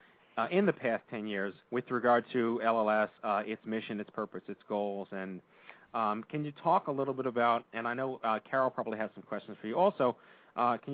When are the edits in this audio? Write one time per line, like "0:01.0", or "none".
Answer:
0:01.6
0:03.2